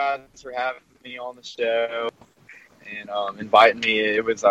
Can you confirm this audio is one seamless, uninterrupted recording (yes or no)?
yes